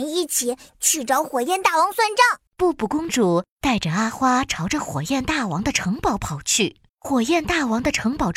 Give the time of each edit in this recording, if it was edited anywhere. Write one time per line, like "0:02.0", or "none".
0:02.5
0:06.9